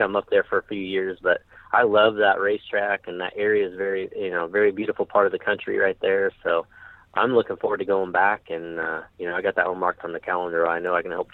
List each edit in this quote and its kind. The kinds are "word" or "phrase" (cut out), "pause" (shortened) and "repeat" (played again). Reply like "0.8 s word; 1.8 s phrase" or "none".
9.1 s pause